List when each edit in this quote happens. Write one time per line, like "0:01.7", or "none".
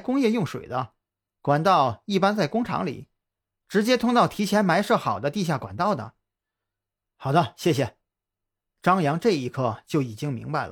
none